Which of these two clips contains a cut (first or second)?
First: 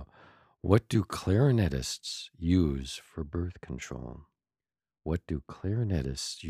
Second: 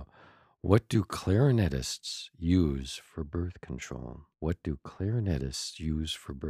second